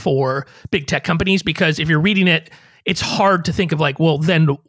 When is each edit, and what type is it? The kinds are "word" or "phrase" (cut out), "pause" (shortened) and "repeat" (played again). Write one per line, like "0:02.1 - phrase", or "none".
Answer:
none